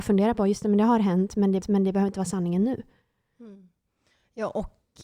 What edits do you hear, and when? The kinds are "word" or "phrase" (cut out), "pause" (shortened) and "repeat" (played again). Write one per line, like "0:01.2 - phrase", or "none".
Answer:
0:01.6 - repeat